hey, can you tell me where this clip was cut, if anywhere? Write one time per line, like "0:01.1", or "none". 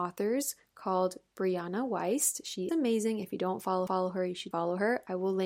0:02.7
0:03.9
0:04.5